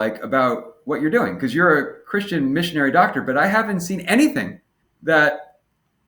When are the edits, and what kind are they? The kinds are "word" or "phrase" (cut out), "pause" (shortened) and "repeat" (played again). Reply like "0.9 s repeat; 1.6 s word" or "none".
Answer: 4.8 s pause